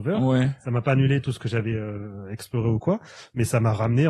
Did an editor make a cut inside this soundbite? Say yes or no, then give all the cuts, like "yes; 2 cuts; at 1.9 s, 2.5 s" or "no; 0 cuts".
no; 0 cuts